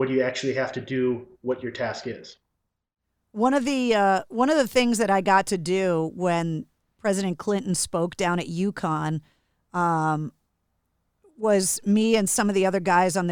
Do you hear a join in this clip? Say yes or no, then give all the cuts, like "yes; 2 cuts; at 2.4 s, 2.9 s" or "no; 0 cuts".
no; 0 cuts